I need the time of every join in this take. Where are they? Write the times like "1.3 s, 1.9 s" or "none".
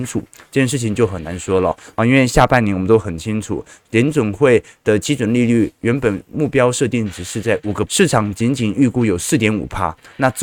7.9 s